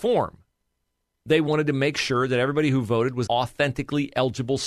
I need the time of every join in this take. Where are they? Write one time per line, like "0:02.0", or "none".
0:03.3